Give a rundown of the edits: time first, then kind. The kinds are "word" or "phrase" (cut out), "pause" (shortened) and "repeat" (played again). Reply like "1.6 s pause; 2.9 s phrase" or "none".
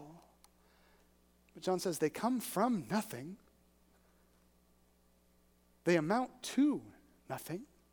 none